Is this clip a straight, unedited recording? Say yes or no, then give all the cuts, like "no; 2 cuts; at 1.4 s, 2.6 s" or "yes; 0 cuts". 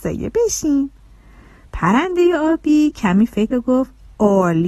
no; 1 cut; at 3.5 s